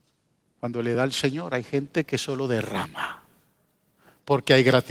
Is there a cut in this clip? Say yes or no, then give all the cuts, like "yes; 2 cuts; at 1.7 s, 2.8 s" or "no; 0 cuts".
no; 0 cuts